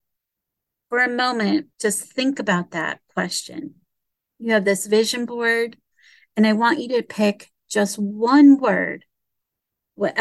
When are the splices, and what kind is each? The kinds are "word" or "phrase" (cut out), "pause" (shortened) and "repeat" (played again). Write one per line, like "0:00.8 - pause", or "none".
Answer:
0:01.7 - pause
0:04.2 - pause